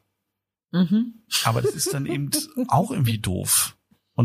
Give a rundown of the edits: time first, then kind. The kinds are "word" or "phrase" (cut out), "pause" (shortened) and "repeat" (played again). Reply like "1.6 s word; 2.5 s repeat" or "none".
none